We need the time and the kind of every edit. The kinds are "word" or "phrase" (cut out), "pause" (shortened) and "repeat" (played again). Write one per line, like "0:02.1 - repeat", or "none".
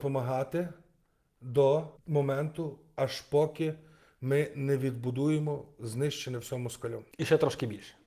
0:02.0 - pause